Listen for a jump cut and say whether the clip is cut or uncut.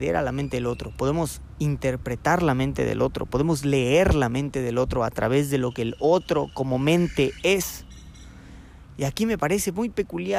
uncut